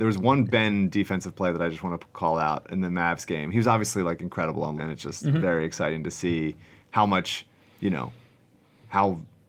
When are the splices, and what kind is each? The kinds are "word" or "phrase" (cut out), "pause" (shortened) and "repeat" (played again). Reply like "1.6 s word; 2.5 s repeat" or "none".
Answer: 4.8 s word

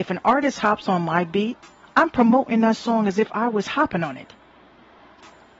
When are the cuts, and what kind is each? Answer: none

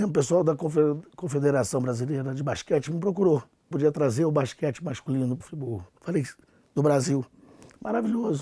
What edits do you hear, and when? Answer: 3.7 s phrase; 5.4 s word; 5.9 s pause

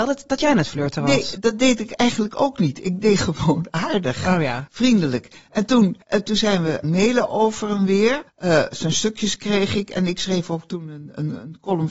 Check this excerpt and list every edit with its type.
6.0 s pause; 6.8 s word; 8.3 s pause

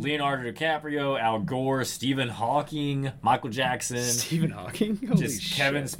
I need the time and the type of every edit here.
none

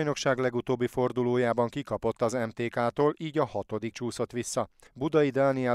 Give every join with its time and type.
3.9 s word

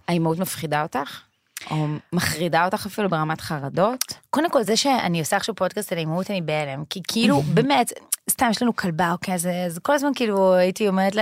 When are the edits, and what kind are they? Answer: none

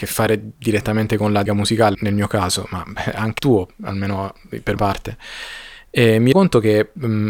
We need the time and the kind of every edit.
1.5 s word; 1.9 s word; 3.4 s word; 4.8 s word; 6.3 s word

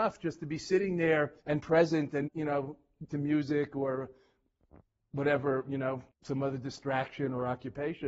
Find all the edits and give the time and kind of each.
1.4 s pause; 2.3 s word; 3.1 s word; 4.7 s pause; 6.1 s pause

